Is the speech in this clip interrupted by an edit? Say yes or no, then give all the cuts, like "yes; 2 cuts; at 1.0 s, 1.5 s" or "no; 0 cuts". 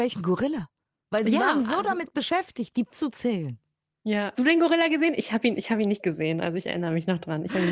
yes; 2 cuts; at 2.9 s, 4.3 s